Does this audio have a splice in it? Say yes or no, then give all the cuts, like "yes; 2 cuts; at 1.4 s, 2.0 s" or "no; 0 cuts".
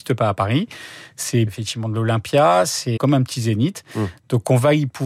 yes; 2 cuts; at 1.5 s, 3.0 s